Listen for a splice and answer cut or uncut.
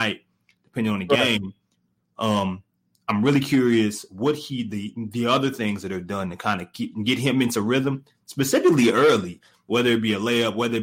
uncut